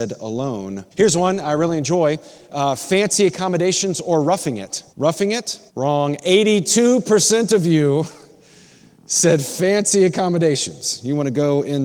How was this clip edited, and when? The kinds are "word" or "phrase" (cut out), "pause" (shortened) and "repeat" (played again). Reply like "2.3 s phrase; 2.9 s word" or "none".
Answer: 0.9 s pause; 4.9 s pause; 5.7 s pause